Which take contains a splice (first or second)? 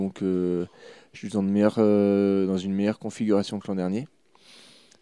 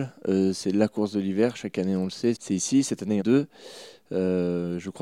second